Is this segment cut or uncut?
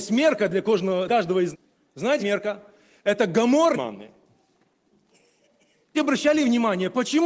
cut